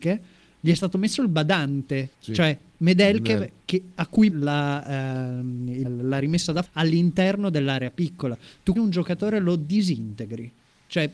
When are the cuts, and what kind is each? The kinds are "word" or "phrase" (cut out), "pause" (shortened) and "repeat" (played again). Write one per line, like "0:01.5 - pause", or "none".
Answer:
0:02.1 - pause
0:04.3 - word
0:05.8 - word
0:06.6 - word
0:08.8 - word